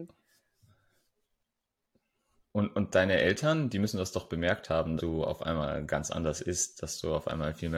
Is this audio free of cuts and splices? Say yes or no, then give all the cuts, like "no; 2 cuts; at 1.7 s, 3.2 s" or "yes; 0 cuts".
no; 1 cut; at 5.0 s